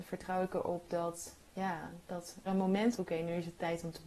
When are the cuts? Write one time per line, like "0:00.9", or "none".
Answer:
0:01.5
0:02.5
0:03.0